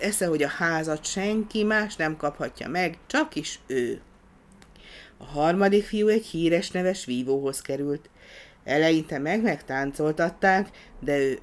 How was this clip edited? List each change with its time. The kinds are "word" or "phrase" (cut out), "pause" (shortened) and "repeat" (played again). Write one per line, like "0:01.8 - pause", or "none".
0:03.0 - pause